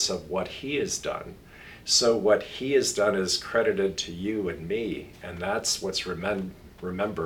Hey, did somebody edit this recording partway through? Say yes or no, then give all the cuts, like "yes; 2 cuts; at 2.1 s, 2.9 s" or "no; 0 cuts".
no; 0 cuts